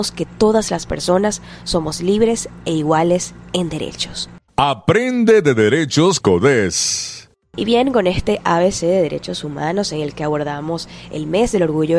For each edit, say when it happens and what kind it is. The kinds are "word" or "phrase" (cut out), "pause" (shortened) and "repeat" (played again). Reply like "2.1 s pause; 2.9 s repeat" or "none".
4.5 s pause; 6.2 s word